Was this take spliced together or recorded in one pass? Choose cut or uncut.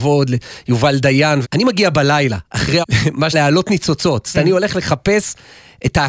cut